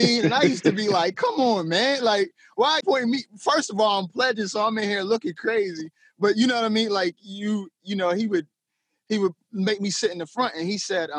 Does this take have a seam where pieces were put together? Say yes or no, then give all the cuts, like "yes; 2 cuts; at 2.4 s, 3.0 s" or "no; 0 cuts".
yes; 1 cut; at 2.8 s